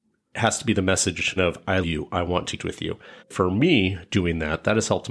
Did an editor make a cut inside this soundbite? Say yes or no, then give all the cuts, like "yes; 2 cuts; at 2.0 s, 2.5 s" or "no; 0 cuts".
yes; 4 cuts; at 1.4 s, 1.8 s, 2.6 s, 3.2 s